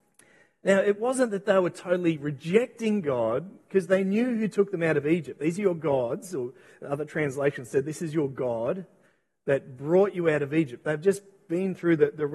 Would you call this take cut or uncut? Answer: uncut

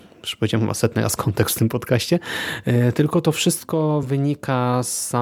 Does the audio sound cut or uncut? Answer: uncut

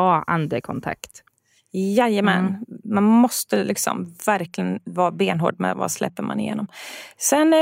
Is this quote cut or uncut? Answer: uncut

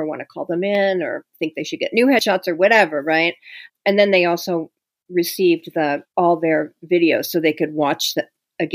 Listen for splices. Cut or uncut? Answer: uncut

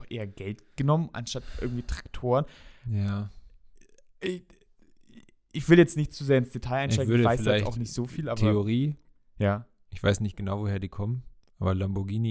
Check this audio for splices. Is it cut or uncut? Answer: uncut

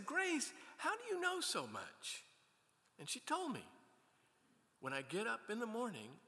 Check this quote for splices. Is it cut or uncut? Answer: uncut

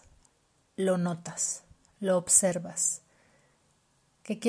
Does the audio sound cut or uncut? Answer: uncut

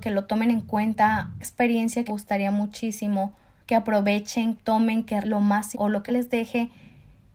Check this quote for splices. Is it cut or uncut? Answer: cut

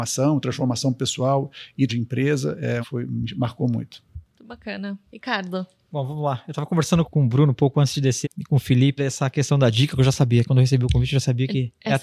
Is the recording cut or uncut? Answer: cut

